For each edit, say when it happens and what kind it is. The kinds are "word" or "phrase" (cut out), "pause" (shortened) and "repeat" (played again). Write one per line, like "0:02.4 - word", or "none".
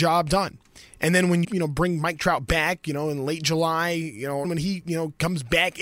0:01.4 - word
0:04.4 - phrase